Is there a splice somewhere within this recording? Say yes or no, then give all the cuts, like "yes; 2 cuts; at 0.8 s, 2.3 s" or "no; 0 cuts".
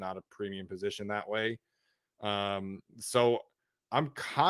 yes; 1 cut; at 2.9 s